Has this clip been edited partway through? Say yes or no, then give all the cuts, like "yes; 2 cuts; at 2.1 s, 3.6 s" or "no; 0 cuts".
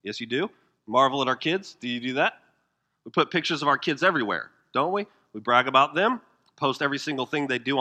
no; 0 cuts